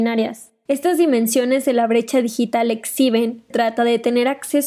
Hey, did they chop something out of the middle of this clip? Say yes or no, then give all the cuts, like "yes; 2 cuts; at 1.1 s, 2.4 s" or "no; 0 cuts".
yes; 1 cut; at 3.5 s